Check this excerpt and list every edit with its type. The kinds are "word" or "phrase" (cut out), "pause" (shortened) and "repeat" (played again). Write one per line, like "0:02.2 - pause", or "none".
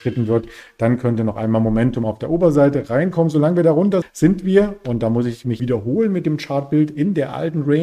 0:04.0 - word
0:05.6 - word